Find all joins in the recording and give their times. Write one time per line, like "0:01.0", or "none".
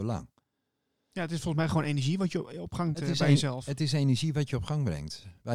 0:02.9

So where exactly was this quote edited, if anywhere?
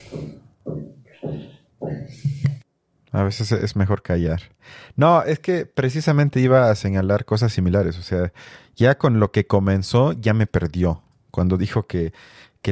none

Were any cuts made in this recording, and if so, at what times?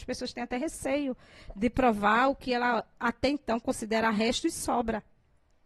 none

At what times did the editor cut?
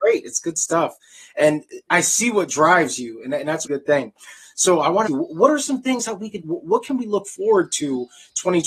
0:01.9
0:03.6
0:05.1
0:06.4

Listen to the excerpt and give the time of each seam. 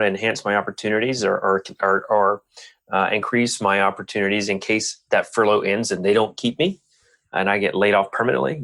none

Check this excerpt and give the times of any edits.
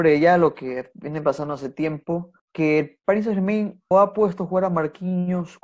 0:02.4
0:03.9

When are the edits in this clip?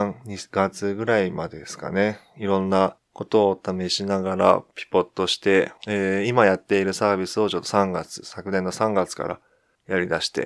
0:05.8

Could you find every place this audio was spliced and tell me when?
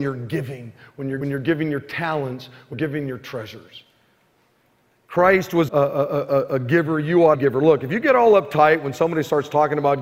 0:01.2
0:02.7
0:05.7
0:07.3

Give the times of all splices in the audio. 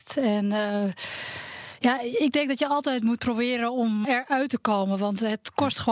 0:04.0

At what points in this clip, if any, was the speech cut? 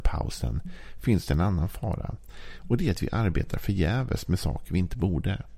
none

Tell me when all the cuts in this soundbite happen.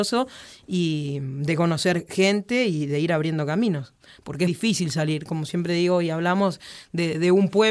0:04.5

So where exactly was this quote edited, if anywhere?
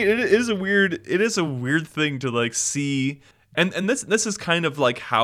none

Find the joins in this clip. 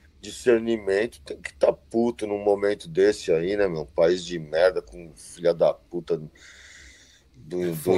none

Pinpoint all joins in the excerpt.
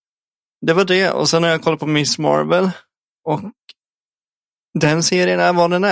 none

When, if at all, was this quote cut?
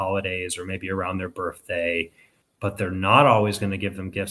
0:02.4

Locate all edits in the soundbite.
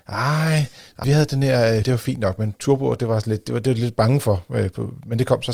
0:01.0
0:01.8

